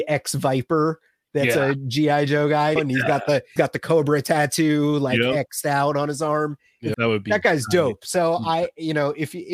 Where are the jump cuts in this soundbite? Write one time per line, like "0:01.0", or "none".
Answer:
0:02.8
0:03.6
0:06.9